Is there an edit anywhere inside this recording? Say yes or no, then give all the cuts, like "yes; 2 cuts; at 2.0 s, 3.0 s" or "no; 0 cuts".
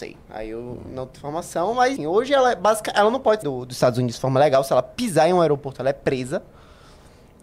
yes; 3 cuts; at 1.2 s, 2.0 s, 3.4 s